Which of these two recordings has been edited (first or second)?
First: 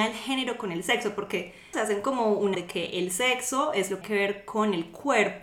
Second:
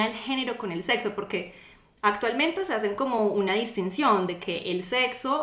first